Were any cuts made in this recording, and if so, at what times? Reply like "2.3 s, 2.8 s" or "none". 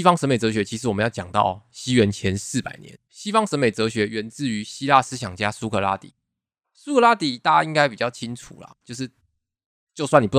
3.1 s